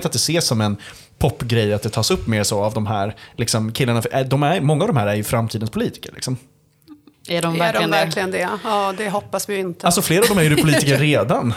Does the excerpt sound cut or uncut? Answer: uncut